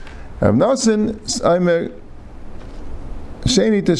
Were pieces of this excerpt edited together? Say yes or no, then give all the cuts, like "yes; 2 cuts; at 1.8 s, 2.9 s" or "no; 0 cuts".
no; 0 cuts